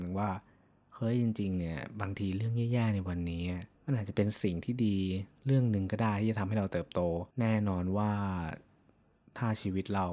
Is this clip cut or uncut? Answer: cut